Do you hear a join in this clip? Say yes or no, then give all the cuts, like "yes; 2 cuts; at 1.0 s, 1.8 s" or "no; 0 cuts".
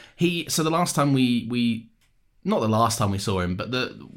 no; 0 cuts